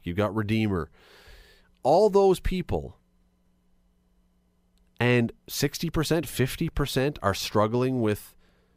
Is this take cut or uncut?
uncut